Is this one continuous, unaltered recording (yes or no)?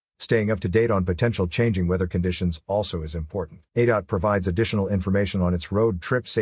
no